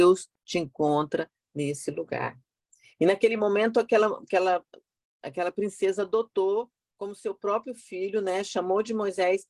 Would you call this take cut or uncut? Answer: uncut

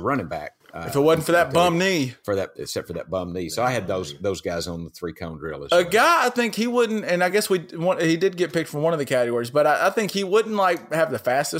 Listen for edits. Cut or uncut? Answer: uncut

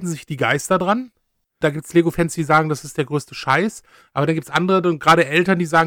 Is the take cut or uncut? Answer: uncut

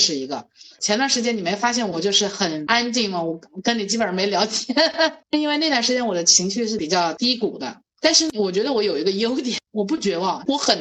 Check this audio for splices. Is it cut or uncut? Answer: cut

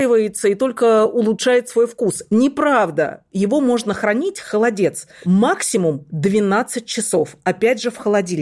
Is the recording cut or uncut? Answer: uncut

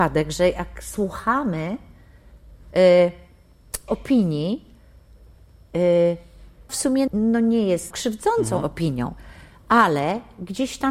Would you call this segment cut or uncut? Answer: cut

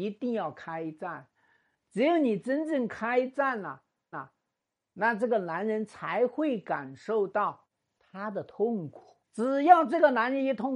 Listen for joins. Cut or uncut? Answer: cut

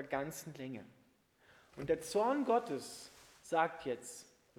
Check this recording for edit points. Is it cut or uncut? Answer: uncut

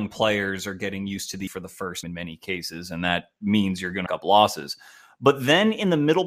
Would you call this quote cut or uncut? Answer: cut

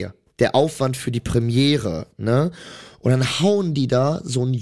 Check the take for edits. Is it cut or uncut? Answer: uncut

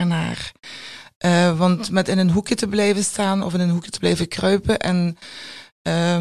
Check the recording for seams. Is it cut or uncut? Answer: uncut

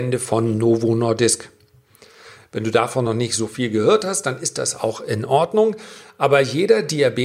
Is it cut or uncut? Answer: uncut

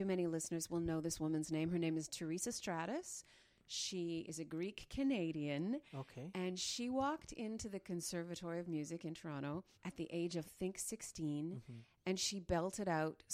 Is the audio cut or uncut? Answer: cut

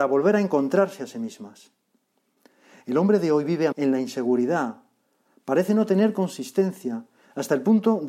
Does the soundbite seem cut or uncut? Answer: cut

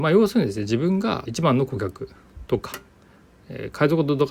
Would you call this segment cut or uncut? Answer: cut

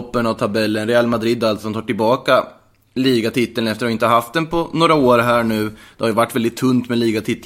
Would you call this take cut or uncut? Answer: uncut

